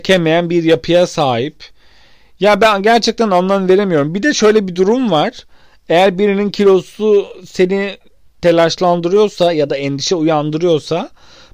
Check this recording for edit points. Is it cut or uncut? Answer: uncut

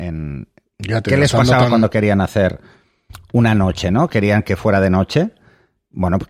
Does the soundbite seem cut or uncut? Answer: uncut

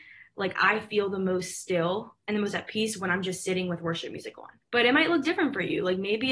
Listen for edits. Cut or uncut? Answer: cut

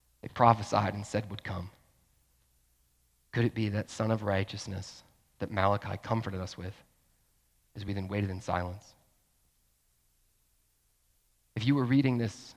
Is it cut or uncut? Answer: uncut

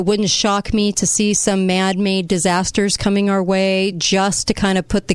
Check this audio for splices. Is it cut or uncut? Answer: uncut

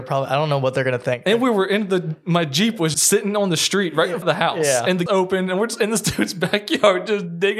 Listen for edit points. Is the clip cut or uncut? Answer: cut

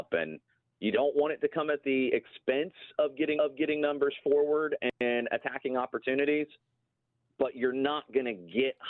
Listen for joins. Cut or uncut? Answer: cut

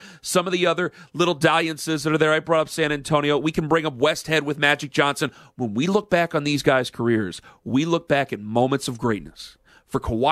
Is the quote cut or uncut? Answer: uncut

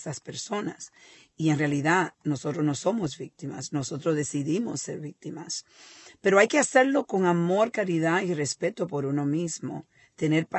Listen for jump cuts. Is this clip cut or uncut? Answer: uncut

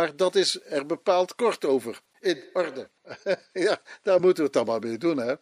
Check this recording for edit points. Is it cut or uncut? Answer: uncut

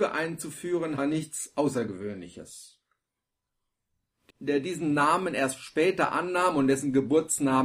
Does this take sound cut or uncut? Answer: cut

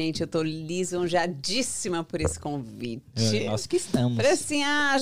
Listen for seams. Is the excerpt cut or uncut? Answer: uncut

